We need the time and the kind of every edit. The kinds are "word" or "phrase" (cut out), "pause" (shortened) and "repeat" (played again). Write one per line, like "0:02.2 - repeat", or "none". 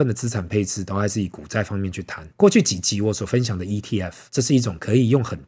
0:02.3 - pause
0:04.3 - pause